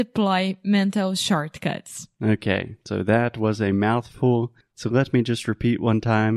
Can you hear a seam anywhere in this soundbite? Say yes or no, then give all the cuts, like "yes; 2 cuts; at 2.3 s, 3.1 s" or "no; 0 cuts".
yes; 1 cut; at 4.6 s